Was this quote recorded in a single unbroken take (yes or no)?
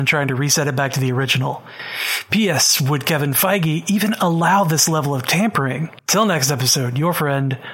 no